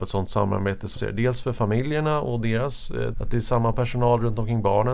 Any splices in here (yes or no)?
yes